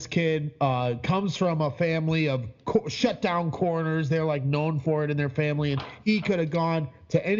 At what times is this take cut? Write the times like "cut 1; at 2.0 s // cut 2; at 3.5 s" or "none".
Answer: none